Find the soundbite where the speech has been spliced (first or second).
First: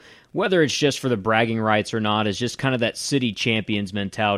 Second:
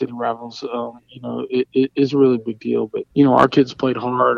second